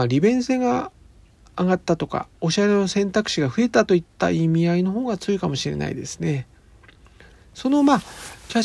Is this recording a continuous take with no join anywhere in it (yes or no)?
no